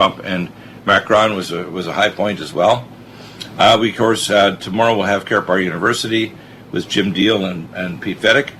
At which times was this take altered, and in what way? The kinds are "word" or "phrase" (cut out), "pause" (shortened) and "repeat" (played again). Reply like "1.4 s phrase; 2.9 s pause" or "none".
none